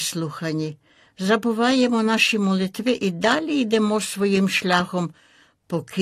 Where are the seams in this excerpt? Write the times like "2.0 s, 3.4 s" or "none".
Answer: none